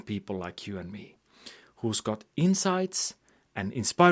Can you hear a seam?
no; 0 cuts

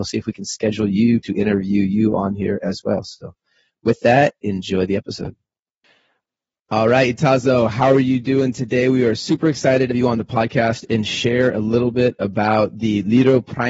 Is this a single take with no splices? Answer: no; 1 cut; at 9.9 s

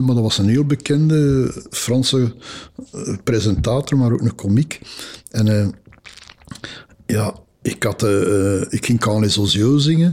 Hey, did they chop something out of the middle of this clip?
no; 0 cuts

